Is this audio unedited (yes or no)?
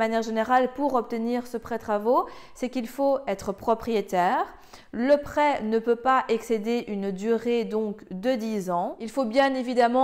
yes